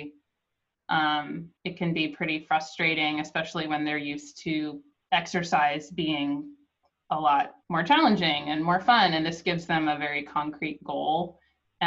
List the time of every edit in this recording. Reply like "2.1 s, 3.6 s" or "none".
1.6 s, 5.0 s, 7.6 s